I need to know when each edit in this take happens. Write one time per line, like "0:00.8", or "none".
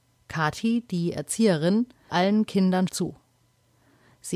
0:02.1
0:02.9